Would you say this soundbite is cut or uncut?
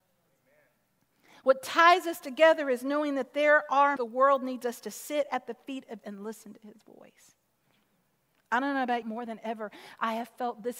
cut